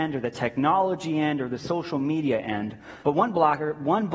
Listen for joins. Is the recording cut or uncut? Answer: cut